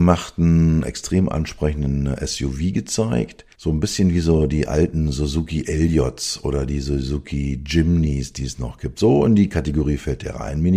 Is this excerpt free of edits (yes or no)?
no